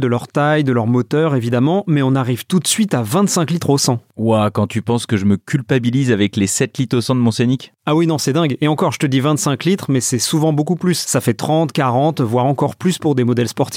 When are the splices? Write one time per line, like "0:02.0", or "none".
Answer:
none